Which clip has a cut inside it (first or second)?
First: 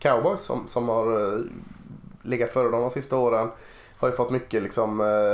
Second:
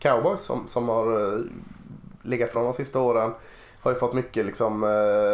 second